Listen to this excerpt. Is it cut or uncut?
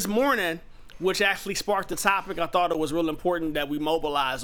uncut